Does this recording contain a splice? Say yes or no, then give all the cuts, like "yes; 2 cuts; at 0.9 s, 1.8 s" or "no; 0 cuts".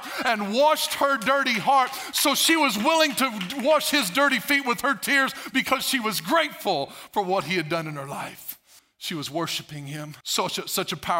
yes; 2 cuts; at 8.8 s, 10.2 s